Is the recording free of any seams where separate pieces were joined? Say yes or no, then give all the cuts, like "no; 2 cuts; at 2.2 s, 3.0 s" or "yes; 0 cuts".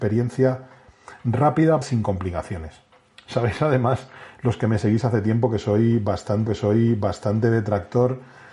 no; 2 cuts; at 1.8 s, 6.5 s